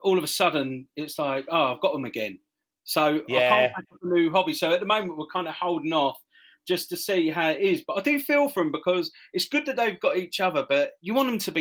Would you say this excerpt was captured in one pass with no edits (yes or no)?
yes